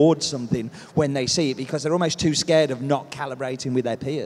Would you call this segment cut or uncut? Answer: uncut